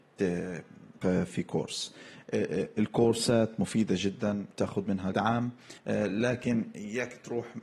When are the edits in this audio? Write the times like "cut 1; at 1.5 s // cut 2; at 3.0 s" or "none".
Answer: cut 1; at 1.0 s // cut 2; at 4.5 s // cut 3; at 5.1 s // cut 4; at 5.8 s